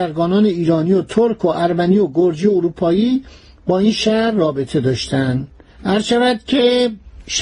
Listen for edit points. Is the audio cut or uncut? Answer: uncut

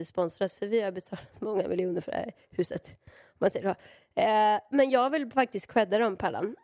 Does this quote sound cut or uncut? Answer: uncut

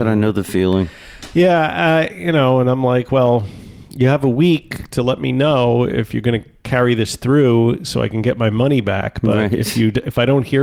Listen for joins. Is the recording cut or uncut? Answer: uncut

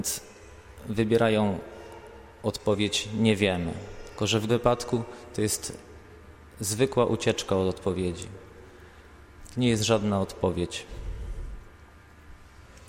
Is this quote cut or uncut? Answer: cut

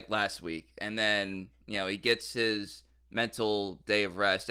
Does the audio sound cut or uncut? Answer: uncut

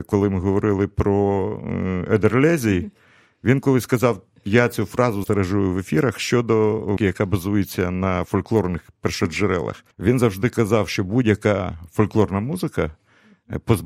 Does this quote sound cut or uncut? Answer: cut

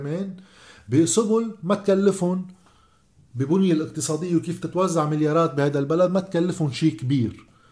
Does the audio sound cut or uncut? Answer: uncut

